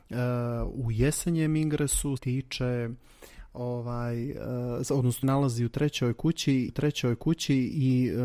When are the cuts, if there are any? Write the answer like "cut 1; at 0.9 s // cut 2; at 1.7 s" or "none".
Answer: cut 1; at 2.2 s // cut 2; at 5.2 s // cut 3; at 6.7 s